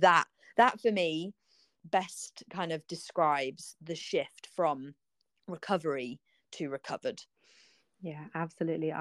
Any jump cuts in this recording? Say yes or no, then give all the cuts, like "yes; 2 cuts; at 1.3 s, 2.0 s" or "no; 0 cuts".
no; 0 cuts